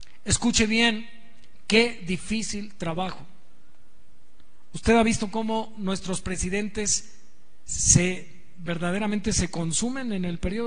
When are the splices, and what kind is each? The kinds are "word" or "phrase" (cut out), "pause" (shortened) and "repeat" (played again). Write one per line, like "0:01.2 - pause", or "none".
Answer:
none

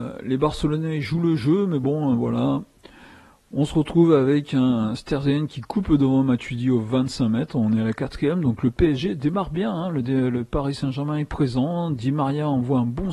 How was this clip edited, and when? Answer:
none

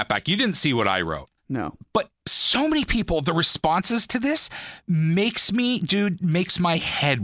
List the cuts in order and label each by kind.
0:01.4 - pause
0:02.2 - pause

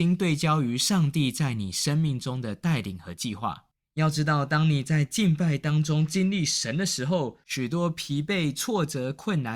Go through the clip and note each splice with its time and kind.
0:03.7 - pause
0:07.4 - pause

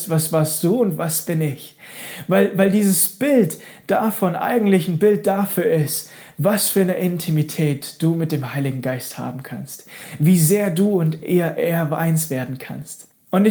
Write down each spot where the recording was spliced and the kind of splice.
none

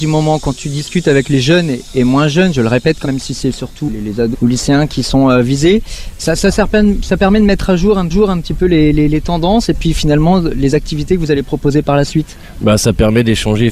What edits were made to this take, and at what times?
0:03.0 - word
0:03.9 - word
0:04.3 - word
0:08.1 - repeat

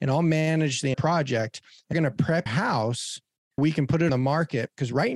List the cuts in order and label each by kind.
0:00.9 - word
0:01.9 - word
0:02.5 - word
0:03.6 - word
0:04.1 - word

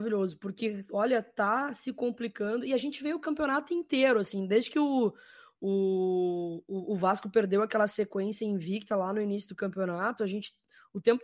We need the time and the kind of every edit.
none

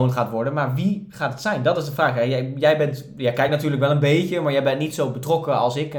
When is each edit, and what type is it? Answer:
none

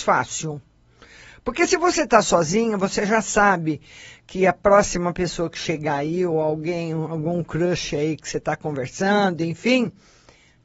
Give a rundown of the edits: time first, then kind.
none

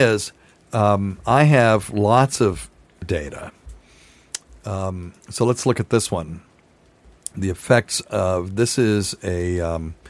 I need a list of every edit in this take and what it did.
0:03.0 - word
0:05.2 - pause

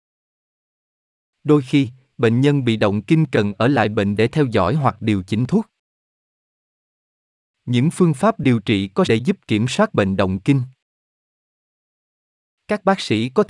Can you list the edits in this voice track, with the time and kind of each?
0:04.2 - word
0:09.1 - word

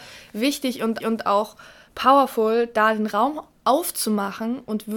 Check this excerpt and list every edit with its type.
0:01.0 - repeat

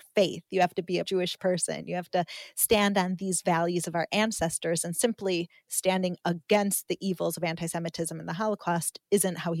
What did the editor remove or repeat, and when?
0:01.0 - word

